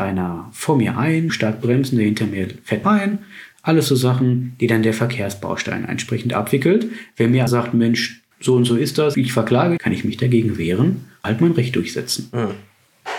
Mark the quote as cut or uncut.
cut